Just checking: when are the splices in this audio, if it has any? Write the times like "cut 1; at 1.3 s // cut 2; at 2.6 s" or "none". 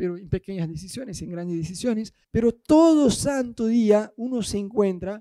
cut 1; at 2.2 s